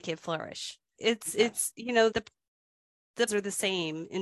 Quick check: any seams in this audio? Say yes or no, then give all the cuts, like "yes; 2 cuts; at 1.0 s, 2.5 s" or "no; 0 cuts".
yes; 3 cuts; at 0.9 s, 2.1 s, 3.3 s